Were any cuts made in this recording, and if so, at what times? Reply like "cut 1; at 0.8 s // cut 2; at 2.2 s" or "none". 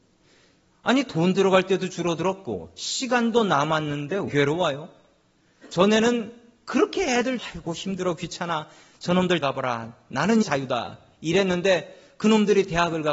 cut 1; at 4.3 s // cut 2; at 7.4 s // cut 3; at 9.4 s // cut 4; at 10.4 s